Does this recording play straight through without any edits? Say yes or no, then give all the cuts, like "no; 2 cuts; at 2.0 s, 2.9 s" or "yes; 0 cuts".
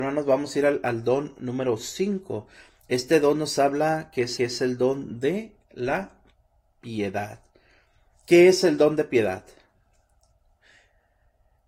no; 1 cut; at 4.4 s